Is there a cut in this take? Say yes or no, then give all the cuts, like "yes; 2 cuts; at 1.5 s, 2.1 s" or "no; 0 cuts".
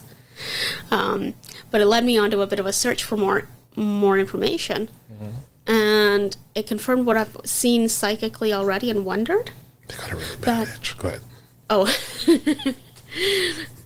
no; 0 cuts